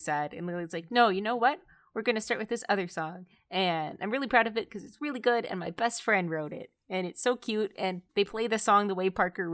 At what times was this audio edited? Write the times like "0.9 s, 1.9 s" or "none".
8.1 s